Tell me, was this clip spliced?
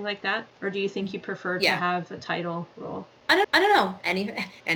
yes; 1 cut; at 3.4 s

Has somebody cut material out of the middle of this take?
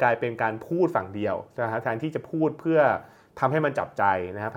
no; 0 cuts

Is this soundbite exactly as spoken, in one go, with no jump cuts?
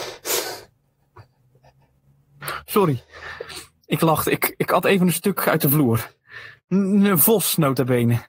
yes; 0 cuts

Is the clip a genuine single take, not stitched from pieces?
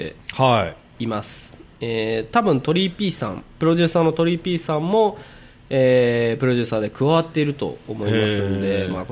yes; 0 cuts

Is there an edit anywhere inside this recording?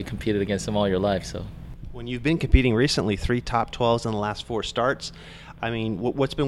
no; 0 cuts

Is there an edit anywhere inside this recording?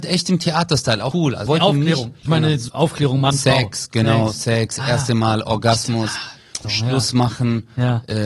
yes; 5 cuts; at 1.1 s, 1.5 s, 2.3 s, 2.7 s, 6.6 s

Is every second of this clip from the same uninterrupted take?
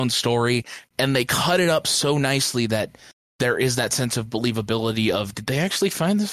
yes; 0 cuts

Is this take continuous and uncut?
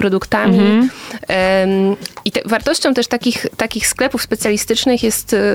yes; 0 cuts

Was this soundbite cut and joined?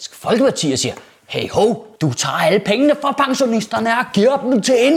yes; 1 cut; at 2.0 s

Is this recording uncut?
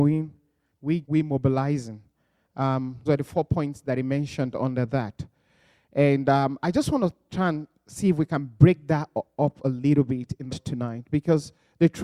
no; 3 cuts; at 1.0 s, 3.1 s, 10.5 s

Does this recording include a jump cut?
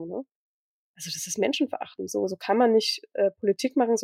no; 0 cuts

